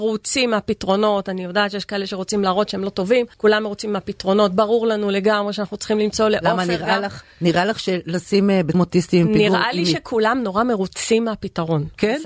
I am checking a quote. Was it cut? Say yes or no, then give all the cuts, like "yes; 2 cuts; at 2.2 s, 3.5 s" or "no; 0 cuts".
yes; 2 cuts; at 3.3 s, 8.7 s